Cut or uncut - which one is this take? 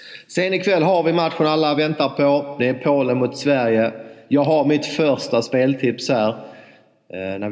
uncut